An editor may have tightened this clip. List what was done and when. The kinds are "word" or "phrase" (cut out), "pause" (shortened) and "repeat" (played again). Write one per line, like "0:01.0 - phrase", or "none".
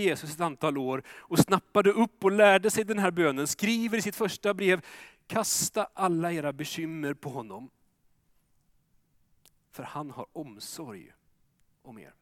none